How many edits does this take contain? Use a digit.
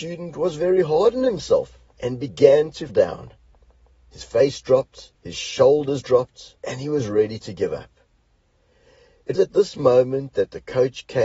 5